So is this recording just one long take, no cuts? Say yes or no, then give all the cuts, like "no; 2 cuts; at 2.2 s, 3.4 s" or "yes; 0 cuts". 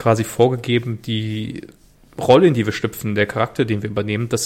yes; 0 cuts